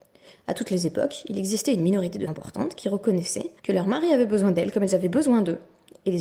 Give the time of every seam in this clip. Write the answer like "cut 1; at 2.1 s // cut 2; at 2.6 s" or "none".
cut 1; at 2.3 s // cut 2; at 3.6 s